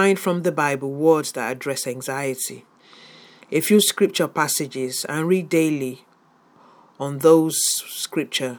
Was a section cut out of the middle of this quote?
no; 0 cuts

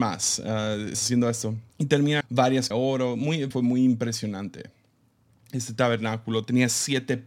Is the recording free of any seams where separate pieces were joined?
no; 5 cuts; at 0.9 s, 1.7 s, 2.2 s, 2.7 s, 3.5 s

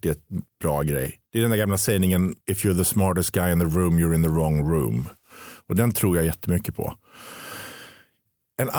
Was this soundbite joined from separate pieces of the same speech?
yes; 2 cuts; at 1.3 s, 2.4 s

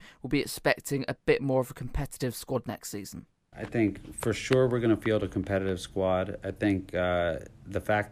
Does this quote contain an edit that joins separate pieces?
no; 0 cuts

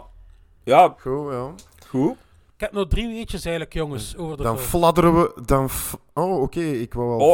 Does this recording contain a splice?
no; 0 cuts

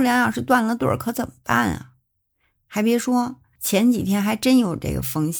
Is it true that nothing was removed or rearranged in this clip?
yes; 0 cuts

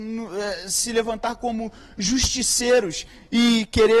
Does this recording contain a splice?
no; 0 cuts

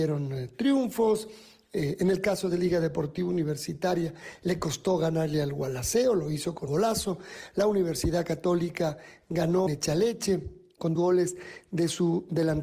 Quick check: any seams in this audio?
yes; 3 cuts; at 6.7 s, 9.7 s, 10.9 s

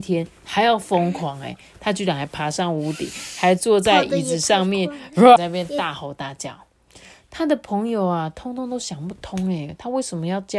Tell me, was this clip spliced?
yes; 1 cut; at 5.4 s

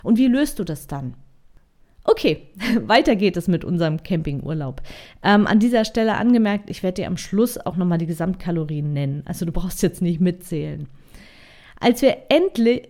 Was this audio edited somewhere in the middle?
no; 0 cuts

